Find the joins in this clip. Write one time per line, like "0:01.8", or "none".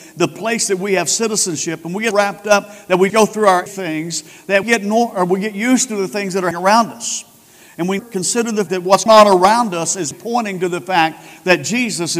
0:02.1
0:03.1
0:03.7
0:04.6
0:06.5
0:08.0
0:08.7
0:09.1
0:10.1